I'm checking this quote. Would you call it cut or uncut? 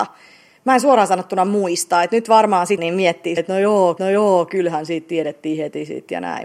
cut